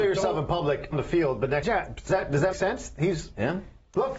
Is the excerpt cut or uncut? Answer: cut